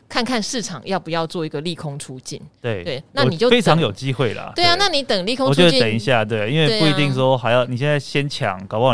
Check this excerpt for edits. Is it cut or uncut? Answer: uncut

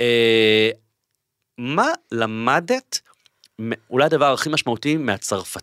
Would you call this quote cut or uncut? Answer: uncut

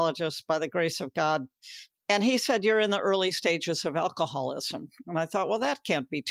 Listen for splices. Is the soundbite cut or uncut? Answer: uncut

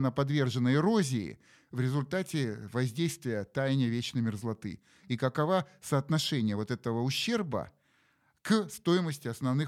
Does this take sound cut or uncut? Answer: uncut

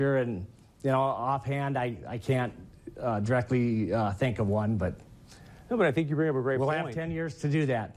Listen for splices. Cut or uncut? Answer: uncut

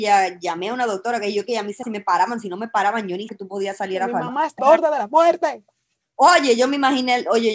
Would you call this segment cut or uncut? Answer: cut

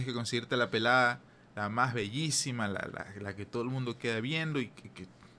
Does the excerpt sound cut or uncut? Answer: uncut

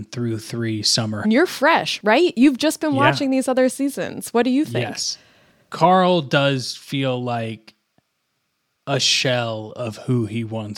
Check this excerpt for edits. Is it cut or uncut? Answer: cut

